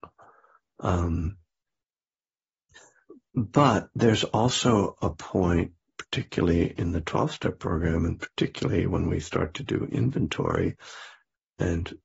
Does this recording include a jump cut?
no; 0 cuts

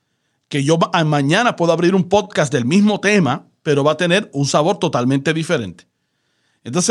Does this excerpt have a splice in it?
no; 0 cuts

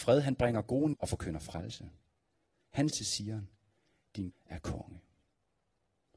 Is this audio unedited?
no; 3 cuts; at 0.9 s, 2.9 s, 4.3 s

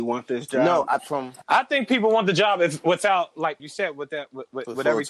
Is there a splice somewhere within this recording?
yes; 2 cuts; at 1.0 s, 3.6 s

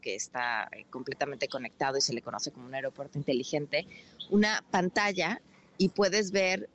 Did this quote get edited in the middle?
no; 0 cuts

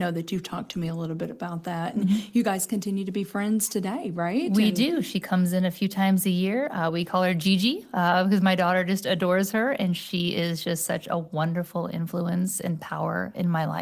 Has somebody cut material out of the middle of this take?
no; 0 cuts

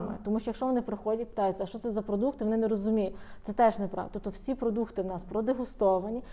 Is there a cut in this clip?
no; 0 cuts

